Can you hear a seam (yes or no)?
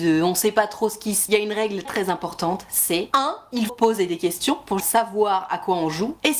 yes